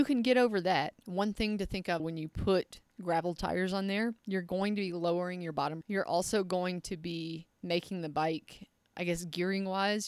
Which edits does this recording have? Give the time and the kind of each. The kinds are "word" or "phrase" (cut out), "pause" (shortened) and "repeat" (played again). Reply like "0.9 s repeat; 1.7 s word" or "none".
1.0 s pause; 2.0 s word; 4.2 s pause; 5.8 s word

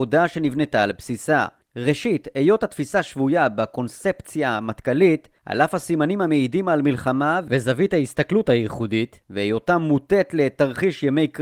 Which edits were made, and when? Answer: none

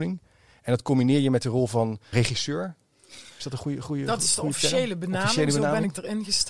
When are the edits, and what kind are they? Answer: 2.1 s word

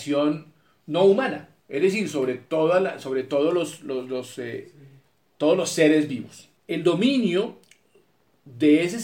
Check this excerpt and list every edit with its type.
1.6 s pause; 6.6 s pause

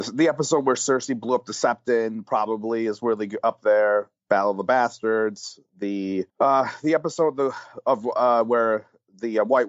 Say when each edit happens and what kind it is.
6.3 s pause

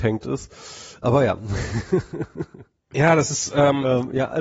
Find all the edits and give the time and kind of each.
none

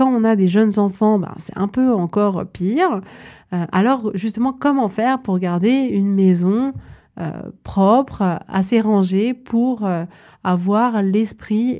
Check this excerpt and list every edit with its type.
none

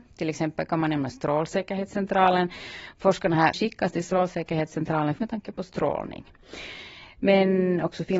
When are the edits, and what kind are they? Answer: 3.5 s phrase; 5.2 s word

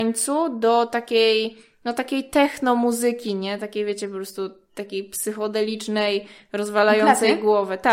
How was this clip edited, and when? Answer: none

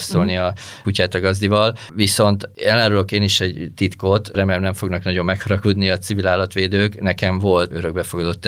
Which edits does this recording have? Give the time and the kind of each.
none

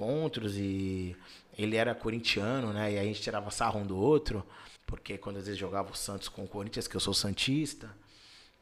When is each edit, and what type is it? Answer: 4.8 s pause

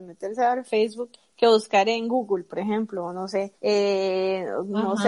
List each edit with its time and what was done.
1.1 s pause; 3.6 s pause

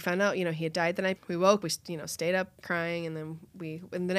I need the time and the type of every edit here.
1.2 s word; 1.6 s word; 2.6 s word

